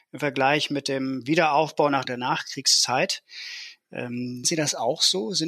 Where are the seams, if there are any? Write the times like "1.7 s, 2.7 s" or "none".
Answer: 2.0 s, 4.4 s